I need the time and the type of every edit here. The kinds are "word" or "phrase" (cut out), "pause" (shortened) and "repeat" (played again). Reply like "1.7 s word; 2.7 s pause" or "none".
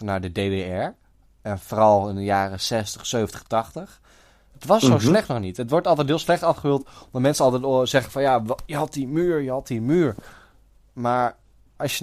none